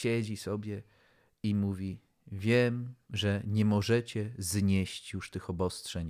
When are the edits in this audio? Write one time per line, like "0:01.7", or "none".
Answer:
none